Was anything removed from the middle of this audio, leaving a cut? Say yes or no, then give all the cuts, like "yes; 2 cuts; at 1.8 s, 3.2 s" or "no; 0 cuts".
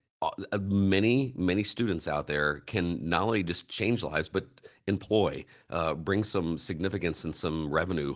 no; 0 cuts